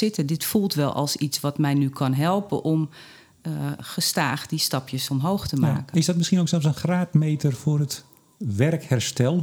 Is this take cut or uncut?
uncut